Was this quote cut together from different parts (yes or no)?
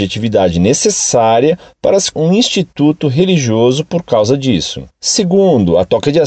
yes